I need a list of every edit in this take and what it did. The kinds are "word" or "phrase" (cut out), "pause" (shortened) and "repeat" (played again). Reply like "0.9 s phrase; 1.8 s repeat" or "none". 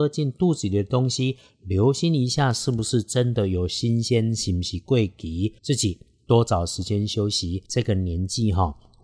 5.6 s pause; 7.7 s pause